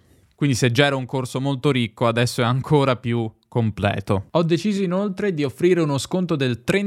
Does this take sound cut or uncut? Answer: uncut